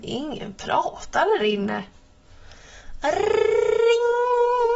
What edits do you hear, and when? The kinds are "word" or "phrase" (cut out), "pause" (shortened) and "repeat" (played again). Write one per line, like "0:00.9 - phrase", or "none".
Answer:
0:01.4 - word